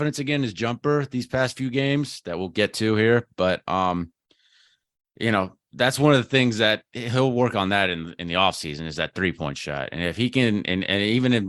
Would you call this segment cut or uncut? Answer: uncut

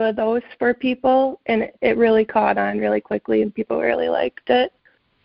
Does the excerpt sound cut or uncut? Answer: uncut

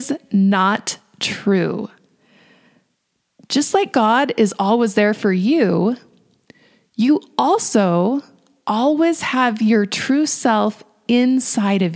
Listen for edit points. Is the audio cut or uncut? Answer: uncut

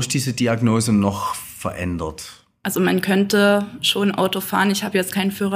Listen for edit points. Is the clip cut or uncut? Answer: uncut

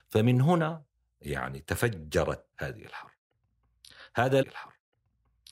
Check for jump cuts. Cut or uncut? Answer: cut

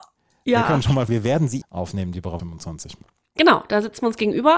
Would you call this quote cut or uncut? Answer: cut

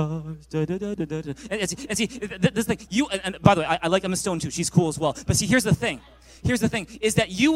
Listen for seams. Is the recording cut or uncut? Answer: uncut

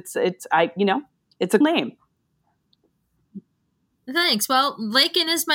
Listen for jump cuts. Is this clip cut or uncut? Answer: cut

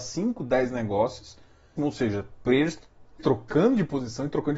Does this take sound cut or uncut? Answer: cut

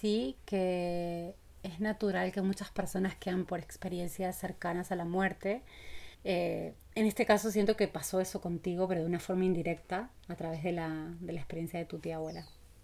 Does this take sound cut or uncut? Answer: cut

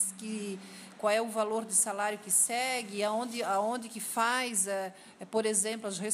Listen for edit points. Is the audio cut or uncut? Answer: uncut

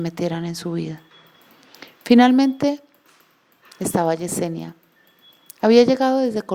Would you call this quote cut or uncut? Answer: uncut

